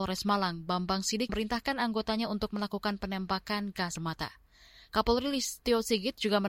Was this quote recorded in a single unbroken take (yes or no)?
no